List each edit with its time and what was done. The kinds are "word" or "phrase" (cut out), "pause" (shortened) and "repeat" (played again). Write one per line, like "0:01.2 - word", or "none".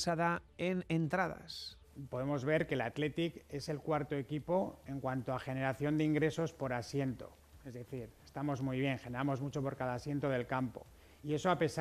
none